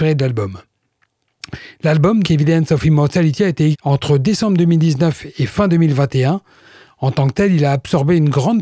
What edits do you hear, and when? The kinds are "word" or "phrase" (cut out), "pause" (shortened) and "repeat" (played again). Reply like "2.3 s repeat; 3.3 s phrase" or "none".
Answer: 2.2 s word; 3.7 s word